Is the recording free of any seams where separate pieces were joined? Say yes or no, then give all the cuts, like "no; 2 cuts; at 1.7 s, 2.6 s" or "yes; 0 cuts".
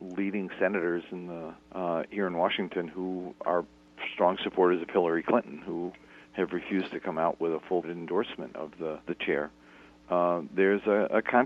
no; 4 cuts; at 1.6 s, 3.4 s, 7.8 s, 9.1 s